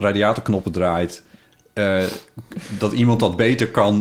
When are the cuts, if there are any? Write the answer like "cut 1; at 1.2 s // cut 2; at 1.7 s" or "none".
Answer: none